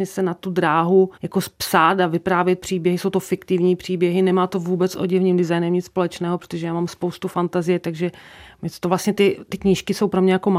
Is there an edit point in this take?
yes; 1 cut; at 1.2 s

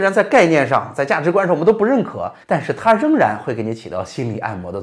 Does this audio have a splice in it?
yes; 1 cut; at 2.4 s

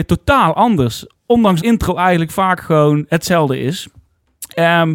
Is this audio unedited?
no; 1 cut; at 1.6 s

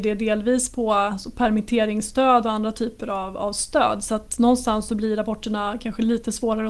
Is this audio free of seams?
yes; 0 cuts

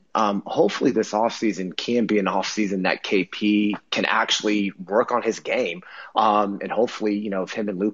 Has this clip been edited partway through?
no; 0 cuts

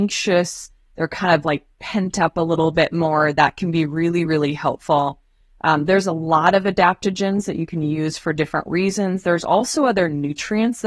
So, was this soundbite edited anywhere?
no; 0 cuts

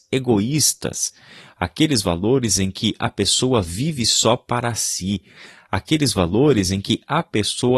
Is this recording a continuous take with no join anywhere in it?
yes; 0 cuts

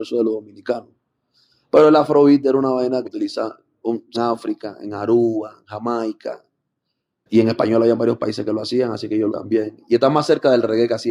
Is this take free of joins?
no; 4 cuts; at 3.0 s, 4.1 s, 7.3 s, 9.3 s

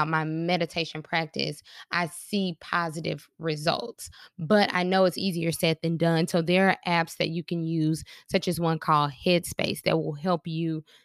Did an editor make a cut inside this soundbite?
no; 0 cuts

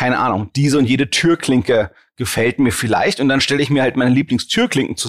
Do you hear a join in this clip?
no; 0 cuts

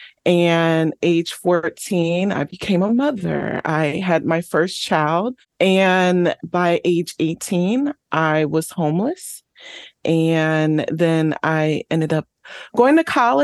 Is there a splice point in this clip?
yes; 1 cut; at 6.4 s

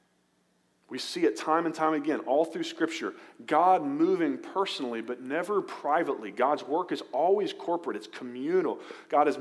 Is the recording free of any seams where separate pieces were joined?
yes; 0 cuts

